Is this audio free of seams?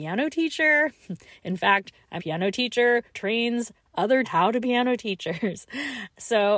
no; 4 cuts; at 2.2 s, 3.1 s, 4.2 s, 4.6 s

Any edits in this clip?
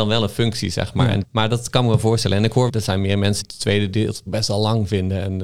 yes; 4 cuts; at 1.2 s, 2.7 s, 3.4 s, 4.3 s

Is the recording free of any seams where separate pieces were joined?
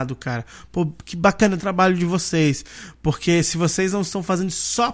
no; 1 cut; at 1.6 s

